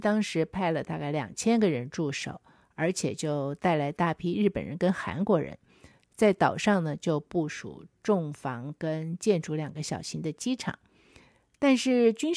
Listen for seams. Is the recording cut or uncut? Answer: uncut